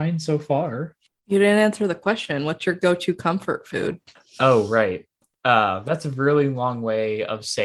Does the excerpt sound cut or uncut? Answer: uncut